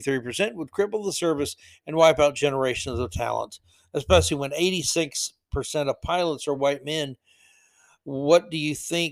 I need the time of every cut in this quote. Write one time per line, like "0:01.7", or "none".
none